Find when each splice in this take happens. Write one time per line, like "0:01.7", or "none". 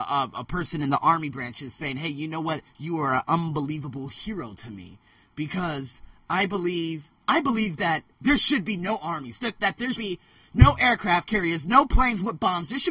0:02.7
0:07.2
0:09.9